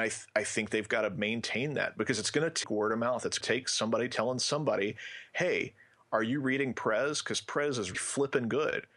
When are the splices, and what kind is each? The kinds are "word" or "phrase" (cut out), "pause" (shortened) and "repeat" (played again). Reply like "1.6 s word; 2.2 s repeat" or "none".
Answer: 2.6 s word; 3.4 s word; 7.9 s word